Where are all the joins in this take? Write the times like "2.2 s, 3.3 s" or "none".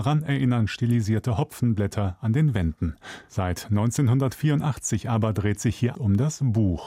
5.9 s